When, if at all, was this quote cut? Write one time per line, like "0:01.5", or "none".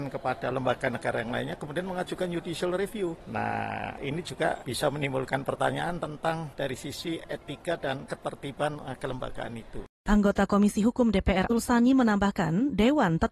0:11.5